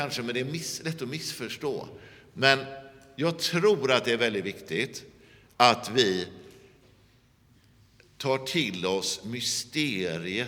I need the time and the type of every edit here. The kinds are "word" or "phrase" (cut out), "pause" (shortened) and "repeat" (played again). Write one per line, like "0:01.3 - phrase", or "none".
none